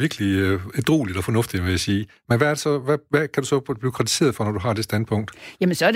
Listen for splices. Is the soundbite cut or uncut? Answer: cut